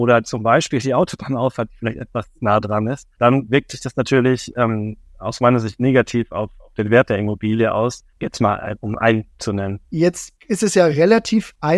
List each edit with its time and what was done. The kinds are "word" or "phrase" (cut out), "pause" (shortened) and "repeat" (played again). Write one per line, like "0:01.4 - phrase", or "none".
0:02.4 - pause
0:03.1 - pause
0:08.1 - pause
0:09.4 - word